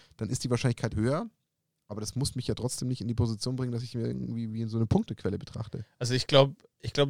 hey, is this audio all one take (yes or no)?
no